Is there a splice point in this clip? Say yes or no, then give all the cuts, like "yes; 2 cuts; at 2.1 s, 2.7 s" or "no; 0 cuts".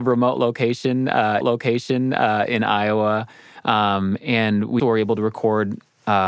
yes; 2 cuts; at 1.4 s, 4.8 s